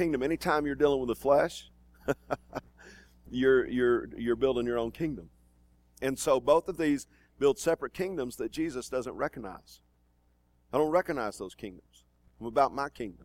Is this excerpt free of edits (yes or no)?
yes